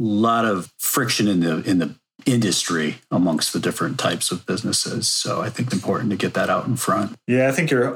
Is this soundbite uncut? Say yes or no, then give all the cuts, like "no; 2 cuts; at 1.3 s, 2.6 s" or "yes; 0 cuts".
no; 1 cut; at 5.7 s